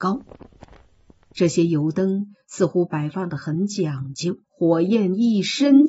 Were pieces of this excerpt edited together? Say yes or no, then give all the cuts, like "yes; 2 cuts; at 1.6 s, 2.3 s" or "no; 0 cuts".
yes; 1 cut; at 4.4 s